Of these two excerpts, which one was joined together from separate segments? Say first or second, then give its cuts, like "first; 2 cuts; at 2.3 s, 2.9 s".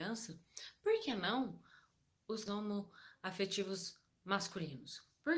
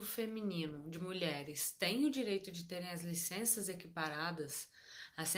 first; 1 cut; at 2.5 s